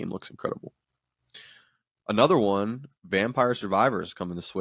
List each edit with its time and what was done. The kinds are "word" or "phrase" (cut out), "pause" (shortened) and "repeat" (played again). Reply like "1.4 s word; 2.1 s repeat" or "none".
3.0 s pause

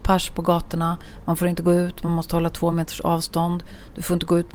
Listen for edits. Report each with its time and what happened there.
none

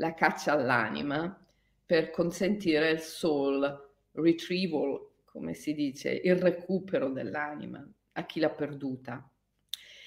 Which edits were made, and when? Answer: none

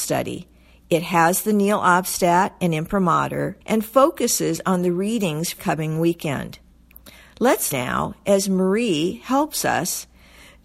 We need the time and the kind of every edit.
3.6 s pause; 5.6 s word; 7.7 s word

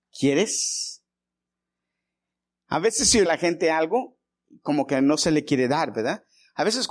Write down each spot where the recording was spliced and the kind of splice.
3.3 s phrase

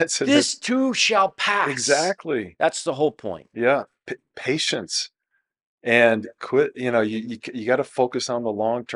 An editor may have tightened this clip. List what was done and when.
none

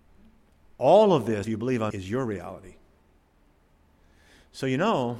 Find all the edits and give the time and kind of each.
1.4 s word; 1.9 s word

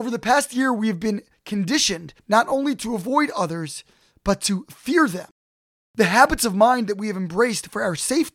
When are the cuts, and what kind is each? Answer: none

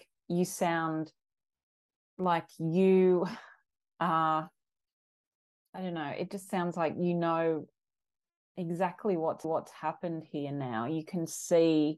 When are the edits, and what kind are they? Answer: 9.4 s repeat

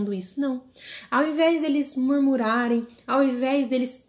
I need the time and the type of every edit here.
none

